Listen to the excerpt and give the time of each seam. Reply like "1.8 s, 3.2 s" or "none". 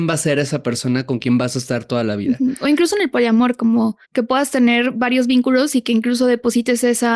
4.0 s